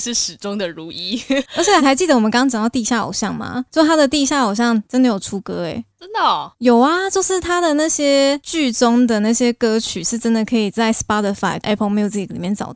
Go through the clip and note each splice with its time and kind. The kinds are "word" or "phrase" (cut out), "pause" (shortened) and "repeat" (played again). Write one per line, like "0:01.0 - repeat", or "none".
0:01.5 - word
0:11.6 - word